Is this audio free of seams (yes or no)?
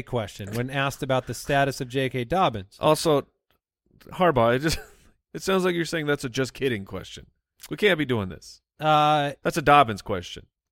yes